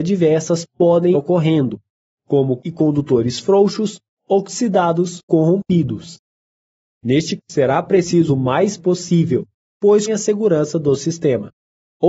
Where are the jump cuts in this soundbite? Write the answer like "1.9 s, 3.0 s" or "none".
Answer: 1.1 s, 2.6 s, 5.3 s, 7.4 s, 8.3 s, 8.8 s, 10.1 s